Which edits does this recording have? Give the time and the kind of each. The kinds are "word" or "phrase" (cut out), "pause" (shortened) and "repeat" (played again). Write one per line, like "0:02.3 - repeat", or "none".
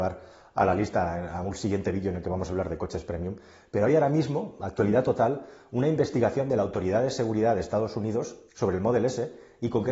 0:08.5 - pause